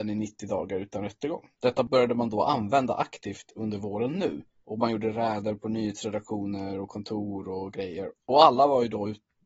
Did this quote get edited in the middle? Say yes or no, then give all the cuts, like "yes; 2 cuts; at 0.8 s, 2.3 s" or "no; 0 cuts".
yes; 1 cut; at 1.5 s